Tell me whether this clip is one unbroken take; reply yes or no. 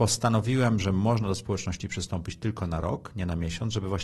yes